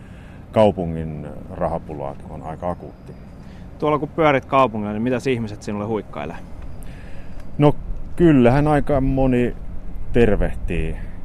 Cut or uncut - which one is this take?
cut